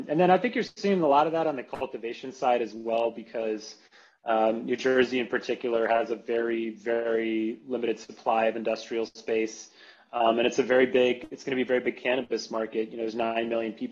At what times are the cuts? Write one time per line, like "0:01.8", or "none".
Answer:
none